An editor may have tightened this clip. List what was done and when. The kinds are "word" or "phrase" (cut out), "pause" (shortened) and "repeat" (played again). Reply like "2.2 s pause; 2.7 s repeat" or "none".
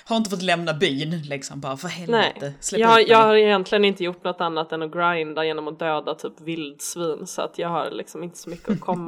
none